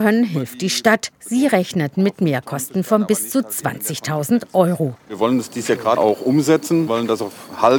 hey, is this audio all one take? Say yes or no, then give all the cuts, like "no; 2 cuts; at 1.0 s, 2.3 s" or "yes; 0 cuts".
no; 2 cuts; at 6.0 s, 6.9 s